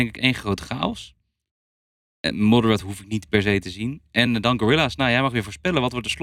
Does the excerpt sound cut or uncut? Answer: uncut